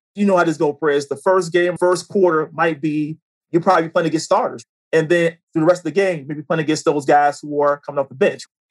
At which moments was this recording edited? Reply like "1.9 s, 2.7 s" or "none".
1.8 s